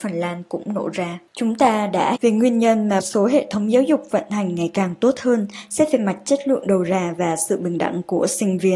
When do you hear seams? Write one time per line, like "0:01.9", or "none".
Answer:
0:01.3
0:02.2
0:03.0

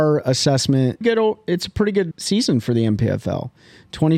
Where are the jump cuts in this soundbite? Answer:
0:01.0
0:02.1

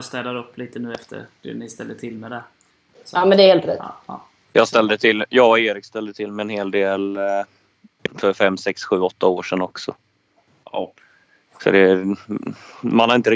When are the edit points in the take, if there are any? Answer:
none

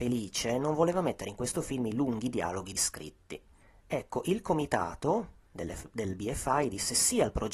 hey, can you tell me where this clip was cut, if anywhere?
0:02.7

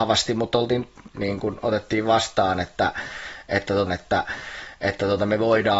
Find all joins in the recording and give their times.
0:01.1
0:03.9

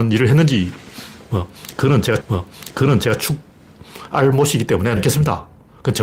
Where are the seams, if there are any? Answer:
0:02.2
0:05.0

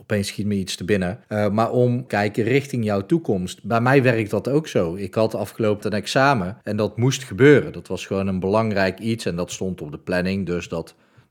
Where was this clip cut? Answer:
0:01.2
0:02.1
0:05.8
0:06.6

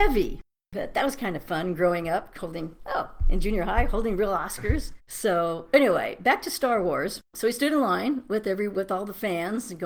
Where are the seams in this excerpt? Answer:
0:05.0
0:07.2

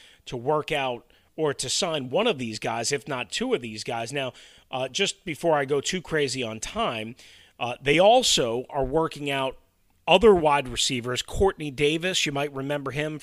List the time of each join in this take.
none

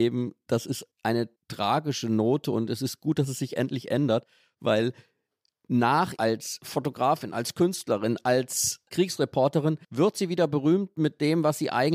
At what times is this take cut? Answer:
0:06.2
0:09.8

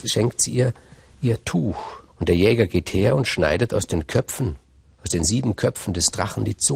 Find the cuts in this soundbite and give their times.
0:02.1

